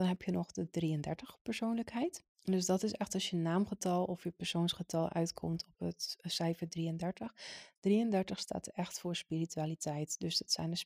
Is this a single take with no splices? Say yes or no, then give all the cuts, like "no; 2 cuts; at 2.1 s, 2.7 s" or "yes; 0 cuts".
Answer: no; 1 cut; at 2.3 s